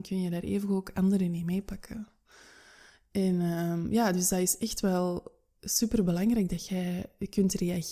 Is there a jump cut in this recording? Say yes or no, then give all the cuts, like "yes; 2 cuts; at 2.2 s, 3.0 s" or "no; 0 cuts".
no; 0 cuts